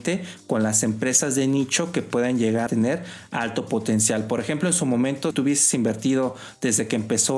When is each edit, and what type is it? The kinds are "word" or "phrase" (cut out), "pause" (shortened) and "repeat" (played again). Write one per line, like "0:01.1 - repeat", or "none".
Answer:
0:02.7 - word
0:05.3 - word